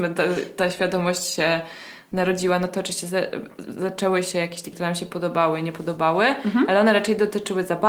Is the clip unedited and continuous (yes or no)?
no